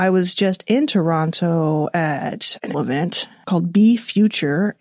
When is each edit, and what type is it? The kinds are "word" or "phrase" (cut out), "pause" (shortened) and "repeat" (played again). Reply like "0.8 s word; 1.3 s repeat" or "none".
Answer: 2.7 s word